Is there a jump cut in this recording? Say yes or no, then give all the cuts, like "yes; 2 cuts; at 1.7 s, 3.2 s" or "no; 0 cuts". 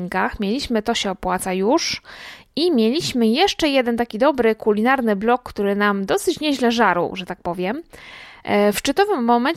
no; 0 cuts